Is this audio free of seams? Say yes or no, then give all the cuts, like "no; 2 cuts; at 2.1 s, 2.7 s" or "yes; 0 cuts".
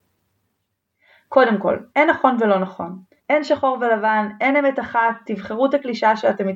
no; 2 cuts; at 1.9 s, 3.2 s